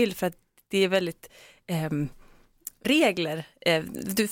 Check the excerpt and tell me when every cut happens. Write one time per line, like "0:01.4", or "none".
0:02.8